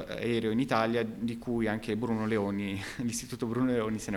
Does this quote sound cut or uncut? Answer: uncut